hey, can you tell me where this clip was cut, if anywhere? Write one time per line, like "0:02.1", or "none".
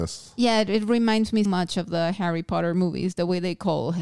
0:01.5